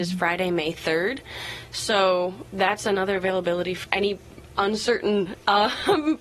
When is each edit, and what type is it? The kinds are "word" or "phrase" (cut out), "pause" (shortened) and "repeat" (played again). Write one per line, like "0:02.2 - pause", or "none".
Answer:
0:03.8 - word